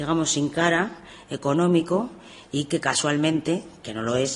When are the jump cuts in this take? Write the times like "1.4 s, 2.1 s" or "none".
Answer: none